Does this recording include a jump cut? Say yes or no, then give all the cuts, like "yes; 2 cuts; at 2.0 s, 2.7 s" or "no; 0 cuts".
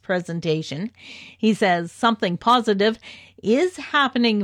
no; 0 cuts